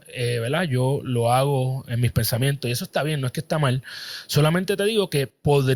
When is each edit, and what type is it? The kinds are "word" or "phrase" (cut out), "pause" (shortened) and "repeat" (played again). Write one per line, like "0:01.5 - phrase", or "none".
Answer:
none